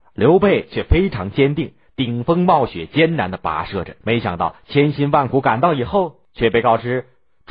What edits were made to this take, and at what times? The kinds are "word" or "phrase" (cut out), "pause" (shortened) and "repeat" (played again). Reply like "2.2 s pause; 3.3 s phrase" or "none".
4.0 s pause